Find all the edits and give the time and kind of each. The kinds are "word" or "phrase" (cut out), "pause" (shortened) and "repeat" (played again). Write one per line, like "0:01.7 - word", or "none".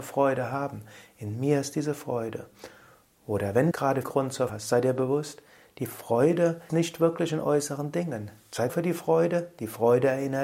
0:03.7 - word
0:04.0 - word
0:04.5 - word
0:06.7 - word
0:08.7 - word